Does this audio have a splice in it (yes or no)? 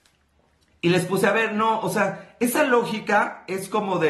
no